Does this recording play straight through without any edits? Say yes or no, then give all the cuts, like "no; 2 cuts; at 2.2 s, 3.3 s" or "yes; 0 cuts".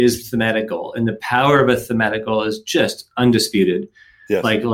yes; 0 cuts